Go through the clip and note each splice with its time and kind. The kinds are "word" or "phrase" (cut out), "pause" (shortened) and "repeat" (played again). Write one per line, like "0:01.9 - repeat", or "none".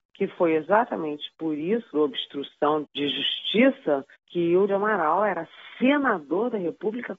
0:01.9 - word
0:02.8 - word
0:04.1 - pause
0:04.7 - word